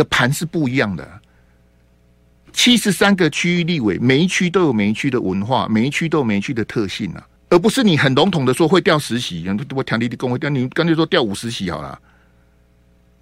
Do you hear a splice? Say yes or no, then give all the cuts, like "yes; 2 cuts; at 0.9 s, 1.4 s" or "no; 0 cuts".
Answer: yes; 1 cut; at 7.4 s